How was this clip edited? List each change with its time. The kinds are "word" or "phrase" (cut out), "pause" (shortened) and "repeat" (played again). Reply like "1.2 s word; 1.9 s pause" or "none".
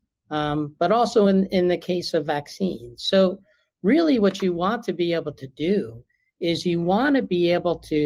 none